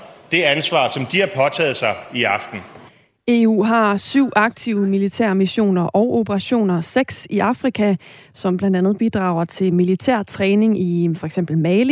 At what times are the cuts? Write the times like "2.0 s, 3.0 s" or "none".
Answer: none